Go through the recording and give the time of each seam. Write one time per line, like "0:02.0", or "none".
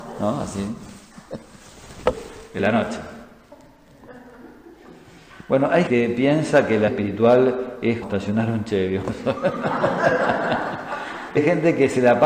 0:02.6
0:05.9
0:06.9
0:08.0
0:11.4